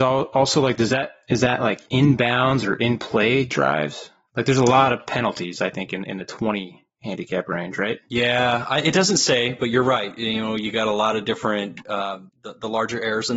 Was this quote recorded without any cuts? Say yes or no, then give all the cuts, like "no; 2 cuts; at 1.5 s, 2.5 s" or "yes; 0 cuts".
no; 1 cut; at 12.3 s